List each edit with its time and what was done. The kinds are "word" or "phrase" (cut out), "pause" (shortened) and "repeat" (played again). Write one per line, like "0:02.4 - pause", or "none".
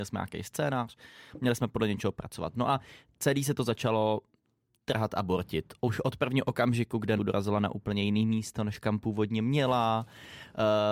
0:07.2 - phrase